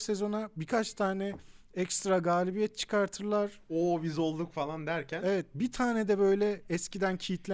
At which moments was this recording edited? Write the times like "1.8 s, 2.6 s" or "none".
none